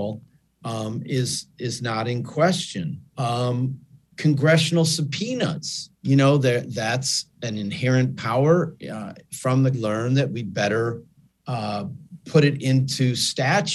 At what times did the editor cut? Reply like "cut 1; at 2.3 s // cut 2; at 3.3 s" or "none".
cut 1; at 3.0 s // cut 2; at 5.9 s // cut 3; at 9.7 s